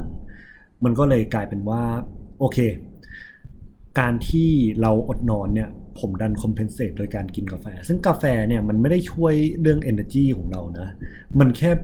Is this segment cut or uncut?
uncut